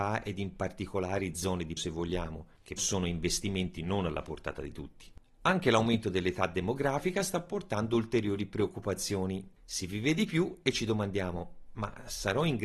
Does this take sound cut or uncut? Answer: cut